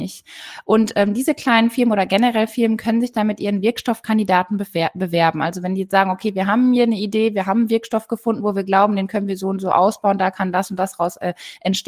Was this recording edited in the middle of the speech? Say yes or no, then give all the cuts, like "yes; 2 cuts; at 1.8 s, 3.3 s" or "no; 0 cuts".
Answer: no; 0 cuts